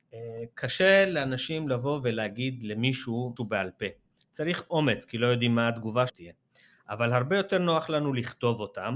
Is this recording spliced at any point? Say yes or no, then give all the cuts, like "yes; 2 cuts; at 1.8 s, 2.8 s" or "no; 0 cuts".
yes; 2 cuts; at 3.4 s, 6.1 s